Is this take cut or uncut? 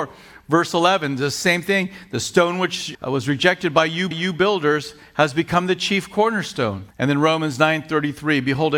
cut